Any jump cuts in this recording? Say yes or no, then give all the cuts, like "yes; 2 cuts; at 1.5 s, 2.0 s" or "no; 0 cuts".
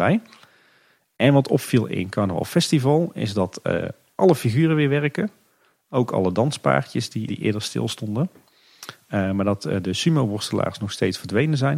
yes; 1 cut; at 7.3 s